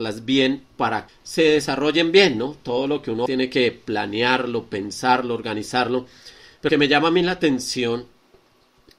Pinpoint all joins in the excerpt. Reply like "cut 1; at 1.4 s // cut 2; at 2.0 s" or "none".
cut 1; at 1.1 s // cut 2; at 3.3 s // cut 3; at 6.7 s